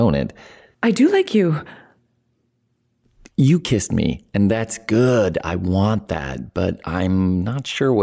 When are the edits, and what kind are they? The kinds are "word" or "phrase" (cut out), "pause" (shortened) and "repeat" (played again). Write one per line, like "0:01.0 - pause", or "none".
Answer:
none